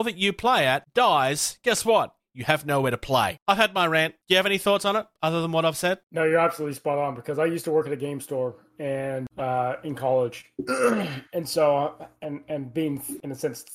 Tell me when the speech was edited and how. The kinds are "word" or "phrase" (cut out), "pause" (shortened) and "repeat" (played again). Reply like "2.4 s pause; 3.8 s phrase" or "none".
4.2 s pause